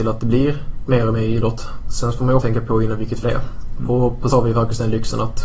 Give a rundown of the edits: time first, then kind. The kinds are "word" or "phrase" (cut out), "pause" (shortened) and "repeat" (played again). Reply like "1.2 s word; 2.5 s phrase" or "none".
2.4 s word; 3.2 s word; 4.3 s word

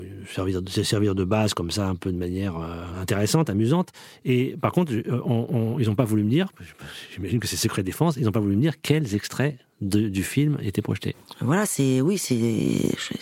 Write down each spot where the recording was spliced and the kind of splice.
none

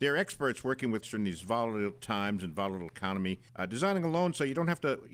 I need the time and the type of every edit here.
1.0 s word; 3.5 s pause

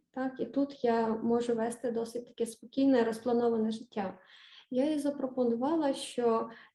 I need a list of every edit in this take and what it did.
none

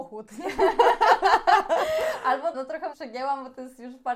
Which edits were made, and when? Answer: 2.5 s word; 2.9 s word

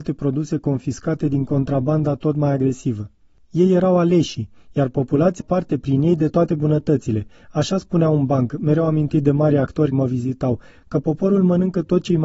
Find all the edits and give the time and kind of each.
5.4 s word; 9.9 s word

